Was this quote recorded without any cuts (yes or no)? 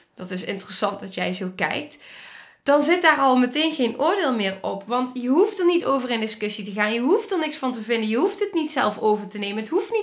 yes